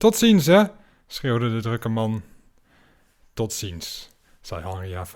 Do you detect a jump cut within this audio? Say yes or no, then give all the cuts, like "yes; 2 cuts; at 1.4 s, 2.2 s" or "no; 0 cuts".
no; 0 cuts